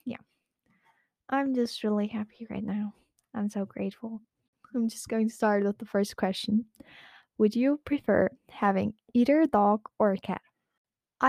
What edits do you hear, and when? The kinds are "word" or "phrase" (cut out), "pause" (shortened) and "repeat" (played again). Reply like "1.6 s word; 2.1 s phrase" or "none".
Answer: none